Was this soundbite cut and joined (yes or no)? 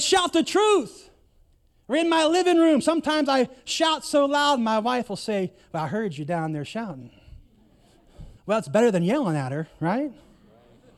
yes